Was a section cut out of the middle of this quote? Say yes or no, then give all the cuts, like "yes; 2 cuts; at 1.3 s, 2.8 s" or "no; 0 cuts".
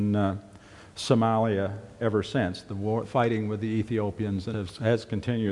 yes; 3 cuts; at 2.0 s, 3.0 s, 4.5 s